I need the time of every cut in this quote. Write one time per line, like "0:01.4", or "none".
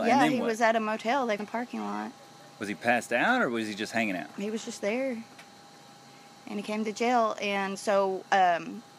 0:01.4
0:07.7